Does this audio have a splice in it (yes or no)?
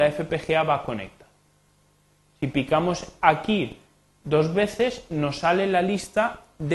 no